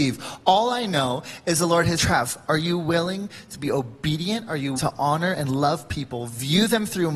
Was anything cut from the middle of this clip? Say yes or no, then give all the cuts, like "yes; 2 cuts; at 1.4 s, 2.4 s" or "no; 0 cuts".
yes; 2 cuts; at 2.0 s, 4.8 s